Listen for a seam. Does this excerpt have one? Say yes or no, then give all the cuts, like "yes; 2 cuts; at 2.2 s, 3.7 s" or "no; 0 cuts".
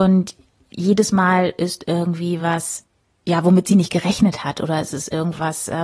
no; 0 cuts